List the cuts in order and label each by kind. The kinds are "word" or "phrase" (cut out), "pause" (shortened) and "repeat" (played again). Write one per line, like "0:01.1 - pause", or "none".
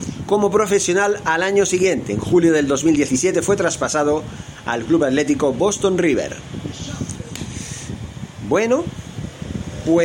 none